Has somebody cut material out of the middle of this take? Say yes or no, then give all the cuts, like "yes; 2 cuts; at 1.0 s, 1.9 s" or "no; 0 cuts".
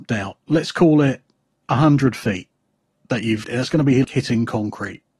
yes; 2 cuts; at 3.4 s, 4.0 s